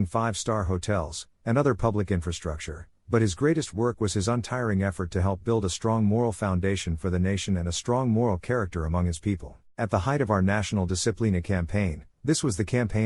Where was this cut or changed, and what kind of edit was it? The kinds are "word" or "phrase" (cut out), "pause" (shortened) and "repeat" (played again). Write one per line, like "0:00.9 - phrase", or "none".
0:09.7 - pause